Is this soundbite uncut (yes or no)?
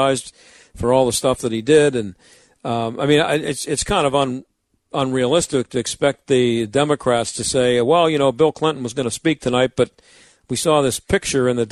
yes